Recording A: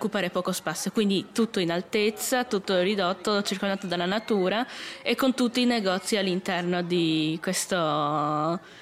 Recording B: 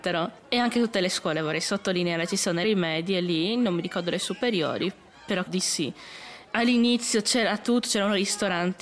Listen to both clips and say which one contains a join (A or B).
B